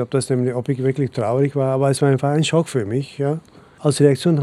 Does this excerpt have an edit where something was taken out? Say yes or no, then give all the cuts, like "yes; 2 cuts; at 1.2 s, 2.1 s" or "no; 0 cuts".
no; 0 cuts